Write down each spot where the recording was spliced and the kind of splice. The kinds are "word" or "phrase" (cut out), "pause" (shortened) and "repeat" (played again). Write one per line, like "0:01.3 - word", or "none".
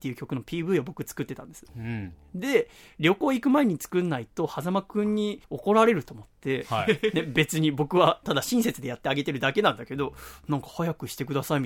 0:01.7 - pause
0:05.4 - pause